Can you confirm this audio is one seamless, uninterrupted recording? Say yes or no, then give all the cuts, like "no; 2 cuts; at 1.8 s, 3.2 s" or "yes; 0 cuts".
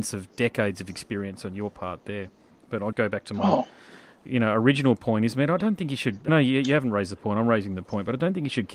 no; 2 cuts; at 2.9 s, 6.3 s